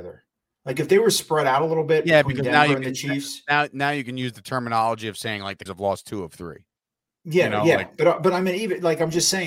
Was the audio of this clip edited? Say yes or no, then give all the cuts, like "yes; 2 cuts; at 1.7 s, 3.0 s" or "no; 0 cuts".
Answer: yes; 1 cut; at 5.7 s